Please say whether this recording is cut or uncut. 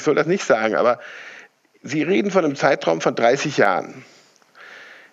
uncut